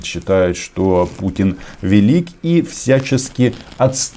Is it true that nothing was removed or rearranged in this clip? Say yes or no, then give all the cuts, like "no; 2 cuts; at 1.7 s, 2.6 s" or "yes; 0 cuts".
yes; 0 cuts